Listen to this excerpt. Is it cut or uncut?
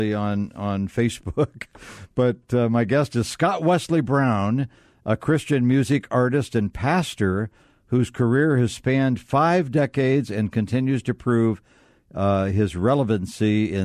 uncut